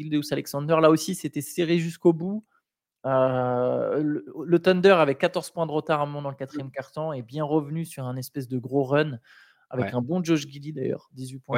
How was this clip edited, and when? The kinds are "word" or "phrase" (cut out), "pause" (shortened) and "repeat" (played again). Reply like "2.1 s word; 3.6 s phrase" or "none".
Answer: none